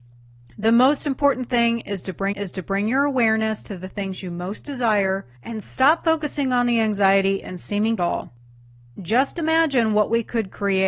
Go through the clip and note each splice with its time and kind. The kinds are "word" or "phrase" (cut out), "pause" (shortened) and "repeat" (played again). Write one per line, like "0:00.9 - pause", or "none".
0:02.3 - repeat
0:05.3 - pause
0:08.0 - phrase